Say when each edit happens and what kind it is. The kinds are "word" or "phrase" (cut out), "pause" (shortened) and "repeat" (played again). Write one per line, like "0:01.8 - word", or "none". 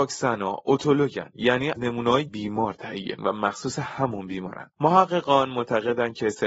0:01.8 - word
0:02.3 - phrase
0:03.2 - word
0:04.7 - pause